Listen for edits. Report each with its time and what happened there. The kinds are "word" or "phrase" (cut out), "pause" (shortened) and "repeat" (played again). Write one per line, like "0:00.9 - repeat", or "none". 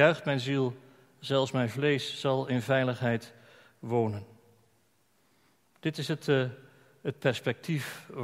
none